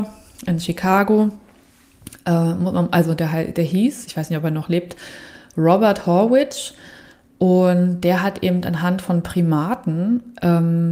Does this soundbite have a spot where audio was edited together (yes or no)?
no